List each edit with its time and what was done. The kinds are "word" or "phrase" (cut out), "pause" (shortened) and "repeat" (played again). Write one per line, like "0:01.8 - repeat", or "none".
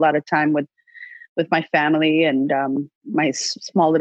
0:03.0 - pause